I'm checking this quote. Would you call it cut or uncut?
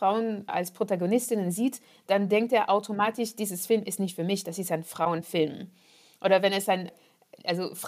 uncut